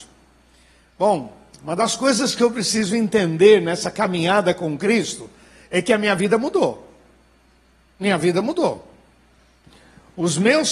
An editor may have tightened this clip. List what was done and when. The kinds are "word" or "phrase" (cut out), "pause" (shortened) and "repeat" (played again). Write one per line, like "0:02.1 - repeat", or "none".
none